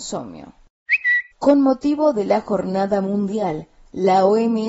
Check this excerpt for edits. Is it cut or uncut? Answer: cut